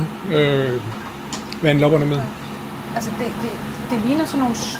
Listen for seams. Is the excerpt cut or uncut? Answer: uncut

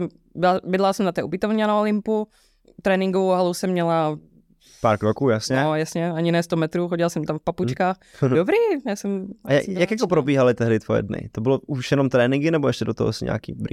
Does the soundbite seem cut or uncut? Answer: uncut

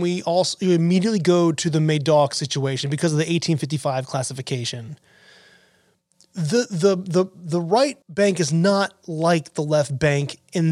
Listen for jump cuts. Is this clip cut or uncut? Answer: cut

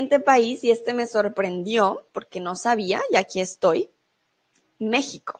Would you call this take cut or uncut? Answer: uncut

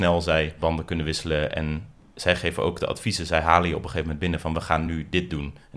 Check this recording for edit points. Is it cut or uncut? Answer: uncut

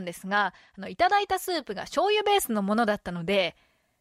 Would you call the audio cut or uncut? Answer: uncut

